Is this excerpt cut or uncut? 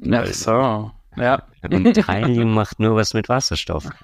uncut